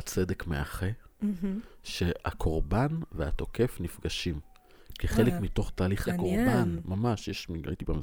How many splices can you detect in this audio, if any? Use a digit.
1